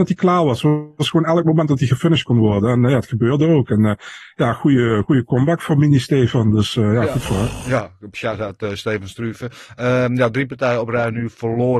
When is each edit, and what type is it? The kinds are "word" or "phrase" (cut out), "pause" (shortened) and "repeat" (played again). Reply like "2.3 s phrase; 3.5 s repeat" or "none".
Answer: none